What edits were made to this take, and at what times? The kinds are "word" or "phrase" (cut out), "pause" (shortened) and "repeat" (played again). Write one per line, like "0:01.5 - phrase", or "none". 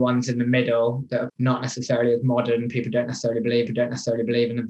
0:01.3 - word
0:03.7 - repeat